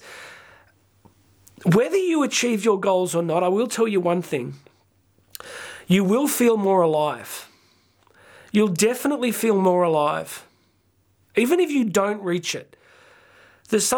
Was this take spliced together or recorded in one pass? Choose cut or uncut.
uncut